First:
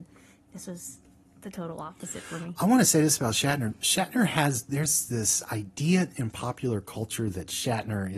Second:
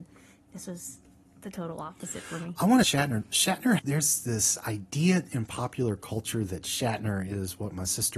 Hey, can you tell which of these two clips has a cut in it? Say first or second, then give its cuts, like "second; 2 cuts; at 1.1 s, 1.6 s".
second; 2 cuts; at 2.8 s, 3.8 s